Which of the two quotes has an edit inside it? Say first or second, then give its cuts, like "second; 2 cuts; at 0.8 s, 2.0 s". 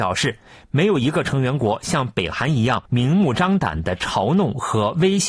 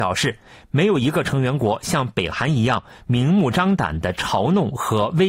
first; 1 cut; at 2.9 s